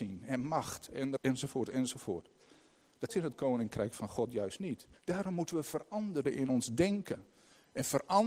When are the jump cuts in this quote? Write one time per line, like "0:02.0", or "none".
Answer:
0:01.2
0:03.1
0:05.0
0:06.2